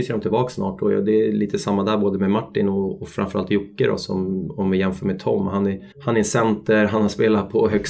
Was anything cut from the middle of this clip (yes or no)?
yes